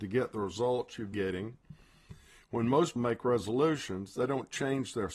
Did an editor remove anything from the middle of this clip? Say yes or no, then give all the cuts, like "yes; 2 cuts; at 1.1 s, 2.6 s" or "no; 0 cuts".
yes; 2 cuts; at 1.1 s, 3.0 s